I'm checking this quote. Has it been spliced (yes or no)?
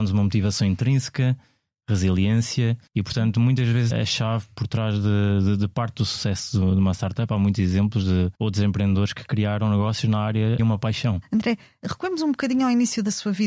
yes